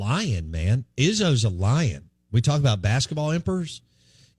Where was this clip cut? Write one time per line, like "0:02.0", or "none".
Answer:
none